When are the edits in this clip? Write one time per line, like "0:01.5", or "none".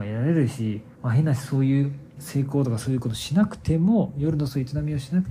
0:00.9
0:02.2